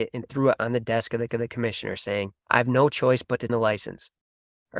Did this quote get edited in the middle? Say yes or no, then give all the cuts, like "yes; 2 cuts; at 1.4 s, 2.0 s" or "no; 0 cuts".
yes; 3 cuts; at 1.3 s, 2.4 s, 3.5 s